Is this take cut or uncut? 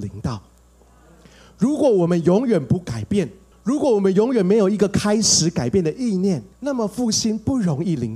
cut